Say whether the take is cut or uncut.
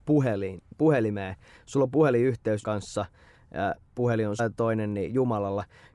cut